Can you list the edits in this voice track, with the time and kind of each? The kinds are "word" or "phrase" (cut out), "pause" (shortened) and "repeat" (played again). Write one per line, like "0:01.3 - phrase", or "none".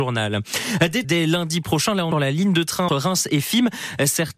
0:01.0 - word
0:02.1 - word
0:02.9 - word